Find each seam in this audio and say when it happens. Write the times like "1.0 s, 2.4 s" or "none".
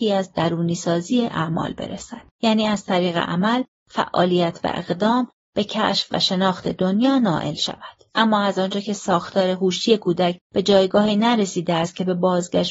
2.3 s, 8.1 s, 10.4 s